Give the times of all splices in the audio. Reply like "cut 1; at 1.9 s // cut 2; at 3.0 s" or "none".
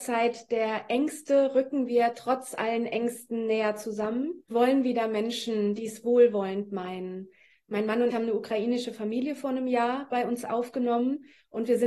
cut 1; at 4.5 s // cut 2; at 5.8 s // cut 3; at 8.1 s